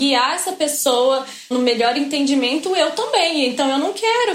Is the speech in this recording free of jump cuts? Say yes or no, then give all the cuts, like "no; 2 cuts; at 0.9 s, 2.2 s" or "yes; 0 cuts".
no; 1 cut; at 1.5 s